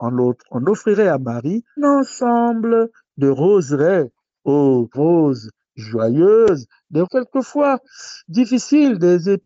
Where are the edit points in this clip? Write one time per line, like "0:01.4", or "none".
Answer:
0:01.8
0:04.9
0:07.0

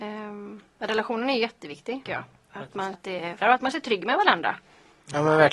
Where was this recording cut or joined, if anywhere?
0:02.1
0:02.9
0:03.4
0:03.7

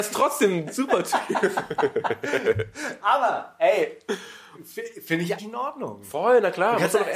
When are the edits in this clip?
0:05.4

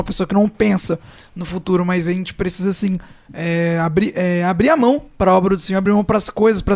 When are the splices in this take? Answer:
none

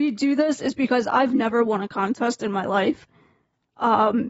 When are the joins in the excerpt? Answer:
none

